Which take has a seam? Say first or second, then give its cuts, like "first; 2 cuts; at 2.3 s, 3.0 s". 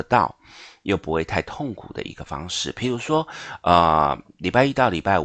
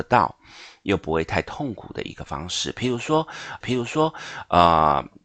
second; 1 cut; at 3.6 s